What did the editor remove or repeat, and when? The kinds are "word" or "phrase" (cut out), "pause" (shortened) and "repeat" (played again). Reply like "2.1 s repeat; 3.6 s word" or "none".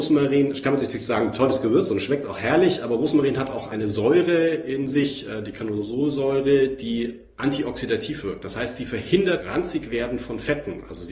9.4 s word